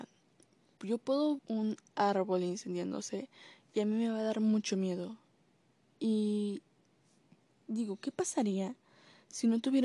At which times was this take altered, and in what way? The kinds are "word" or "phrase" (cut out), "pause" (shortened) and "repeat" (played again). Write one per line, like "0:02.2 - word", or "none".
0:01.4 - word